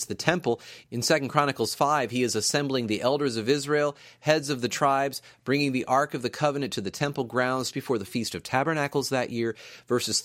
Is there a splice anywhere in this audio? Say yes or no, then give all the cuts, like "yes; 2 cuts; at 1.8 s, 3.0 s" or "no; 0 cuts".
yes; 1 cut; at 7.7 s